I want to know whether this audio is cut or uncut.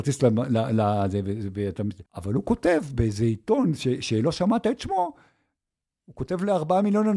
cut